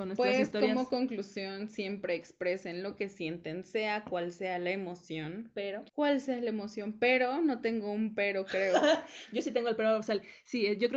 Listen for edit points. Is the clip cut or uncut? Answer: cut